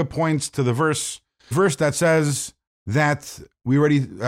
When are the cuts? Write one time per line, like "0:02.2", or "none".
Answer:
0:01.5
0:02.7